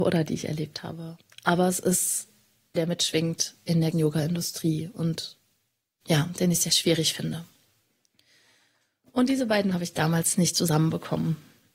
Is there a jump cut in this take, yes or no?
yes